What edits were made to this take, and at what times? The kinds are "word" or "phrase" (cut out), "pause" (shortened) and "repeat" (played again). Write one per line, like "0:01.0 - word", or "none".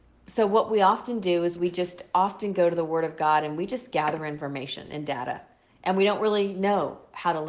0:05.7 - pause